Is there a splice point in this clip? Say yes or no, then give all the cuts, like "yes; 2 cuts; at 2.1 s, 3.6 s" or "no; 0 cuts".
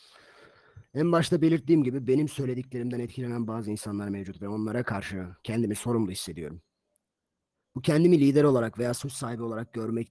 no; 0 cuts